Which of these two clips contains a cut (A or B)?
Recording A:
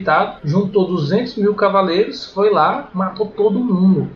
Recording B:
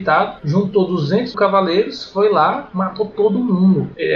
B